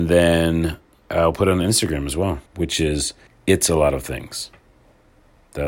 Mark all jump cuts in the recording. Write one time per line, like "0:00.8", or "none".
0:00.9
0:02.5
0:03.3